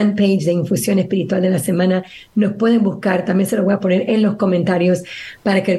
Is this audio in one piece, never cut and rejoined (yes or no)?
yes